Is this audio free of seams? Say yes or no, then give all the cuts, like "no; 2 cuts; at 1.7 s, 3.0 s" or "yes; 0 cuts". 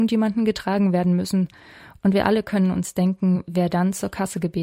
yes; 0 cuts